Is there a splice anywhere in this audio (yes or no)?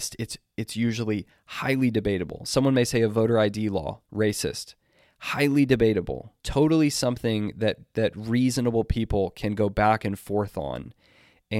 yes